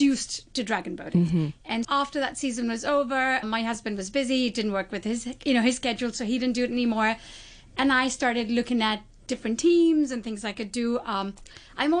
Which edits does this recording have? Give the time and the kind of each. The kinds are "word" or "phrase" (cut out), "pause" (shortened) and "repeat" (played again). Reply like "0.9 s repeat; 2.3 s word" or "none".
1.8 s word; 3.4 s word